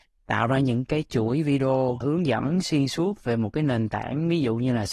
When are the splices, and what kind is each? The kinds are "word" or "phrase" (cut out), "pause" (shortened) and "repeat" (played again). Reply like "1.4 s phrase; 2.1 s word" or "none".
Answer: 2.0 s word